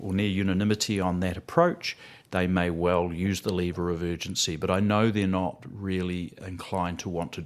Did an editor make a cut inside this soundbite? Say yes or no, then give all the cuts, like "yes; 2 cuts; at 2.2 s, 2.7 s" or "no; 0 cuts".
no; 0 cuts